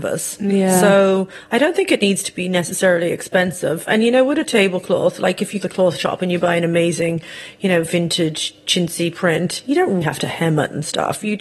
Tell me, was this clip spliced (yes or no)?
yes